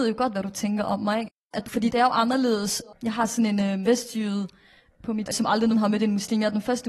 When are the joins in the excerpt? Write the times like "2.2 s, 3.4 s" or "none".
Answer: 1.6 s, 3.8 s, 5.3 s, 5.7 s